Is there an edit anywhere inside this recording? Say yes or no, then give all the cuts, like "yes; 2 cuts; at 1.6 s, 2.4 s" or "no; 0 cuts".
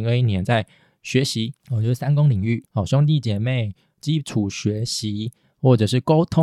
yes; 1 cut; at 2.7 s